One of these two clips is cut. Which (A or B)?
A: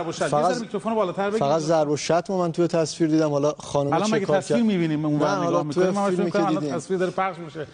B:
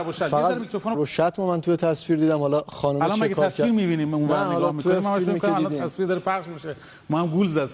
B